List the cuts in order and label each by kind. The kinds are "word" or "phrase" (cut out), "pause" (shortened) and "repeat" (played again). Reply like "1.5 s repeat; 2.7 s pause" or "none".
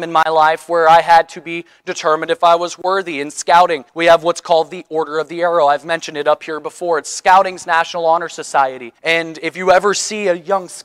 3.9 s pause; 9.0 s pause